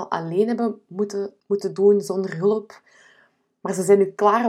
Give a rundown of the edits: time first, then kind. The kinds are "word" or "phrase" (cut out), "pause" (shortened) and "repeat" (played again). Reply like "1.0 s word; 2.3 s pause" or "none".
none